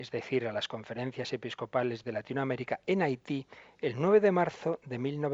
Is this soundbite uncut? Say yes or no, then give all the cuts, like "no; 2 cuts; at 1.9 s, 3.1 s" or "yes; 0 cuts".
yes; 0 cuts